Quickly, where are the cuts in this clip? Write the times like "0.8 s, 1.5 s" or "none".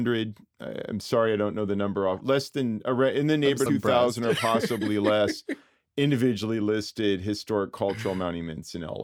3.7 s